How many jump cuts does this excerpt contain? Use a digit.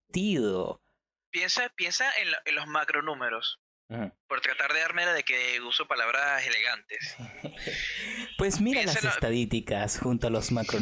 1